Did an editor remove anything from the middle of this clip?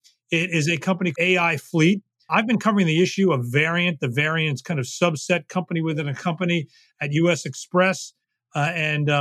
yes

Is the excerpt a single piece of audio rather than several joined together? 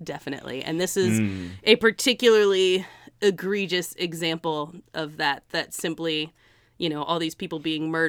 yes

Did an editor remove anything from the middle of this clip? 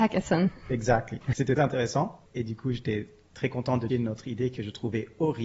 yes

